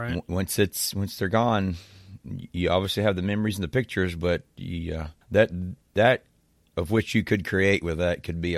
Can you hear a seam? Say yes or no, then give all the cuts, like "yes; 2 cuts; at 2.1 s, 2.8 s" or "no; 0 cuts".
yes; 1 cut; at 5.2 s